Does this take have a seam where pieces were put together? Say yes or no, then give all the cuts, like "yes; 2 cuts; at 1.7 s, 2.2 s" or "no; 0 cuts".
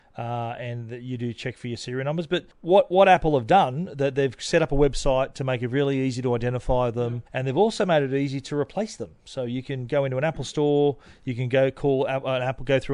yes; 2 cuts; at 2.5 s, 7.3 s